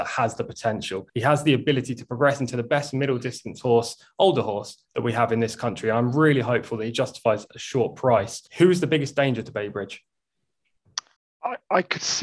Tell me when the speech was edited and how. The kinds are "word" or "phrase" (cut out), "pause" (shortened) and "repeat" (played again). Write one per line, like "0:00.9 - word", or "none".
0:01.1 - pause
0:04.9 - pause
0:08.5 - pause
0:11.2 - pause